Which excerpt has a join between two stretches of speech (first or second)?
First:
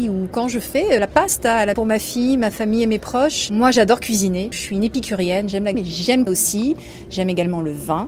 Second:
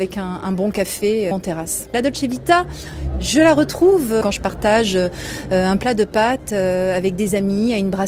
first